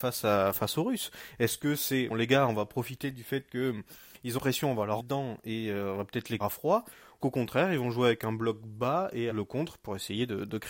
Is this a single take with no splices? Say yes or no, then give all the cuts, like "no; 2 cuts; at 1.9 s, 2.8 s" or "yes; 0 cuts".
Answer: no; 6 cuts; at 2.1 s, 4.4 s, 5.0 s, 6.4 s, 7.2 s, 9.3 s